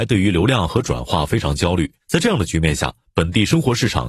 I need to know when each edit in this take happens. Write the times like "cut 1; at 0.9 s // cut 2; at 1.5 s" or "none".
cut 1; at 2.0 s